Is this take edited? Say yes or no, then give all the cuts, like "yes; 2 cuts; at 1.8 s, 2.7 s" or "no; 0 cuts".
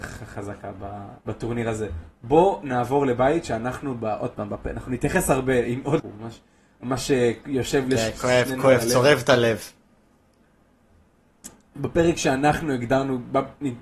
yes; 2 cuts; at 1.2 s, 6.0 s